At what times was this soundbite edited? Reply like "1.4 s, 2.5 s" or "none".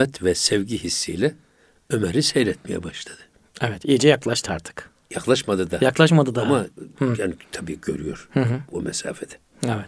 none